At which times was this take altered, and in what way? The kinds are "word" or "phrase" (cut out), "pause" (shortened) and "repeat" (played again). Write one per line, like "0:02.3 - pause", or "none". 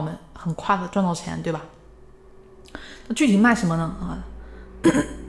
none